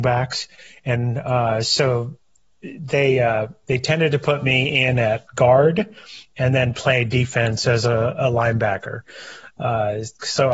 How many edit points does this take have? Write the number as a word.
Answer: zero